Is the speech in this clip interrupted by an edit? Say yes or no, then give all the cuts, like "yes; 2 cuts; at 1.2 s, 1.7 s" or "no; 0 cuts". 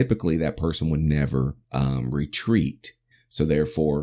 yes; 1 cut; at 1.6 s